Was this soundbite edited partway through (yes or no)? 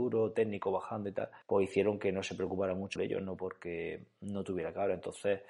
yes